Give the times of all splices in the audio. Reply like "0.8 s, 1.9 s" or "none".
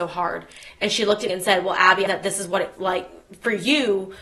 1.3 s, 2.1 s, 2.8 s